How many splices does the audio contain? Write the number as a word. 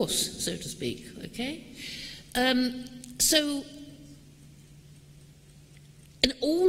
zero